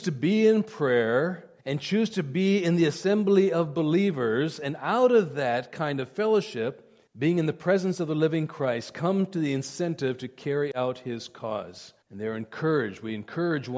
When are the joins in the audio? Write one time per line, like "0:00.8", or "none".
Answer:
0:01.6
0:07.1
0:12.0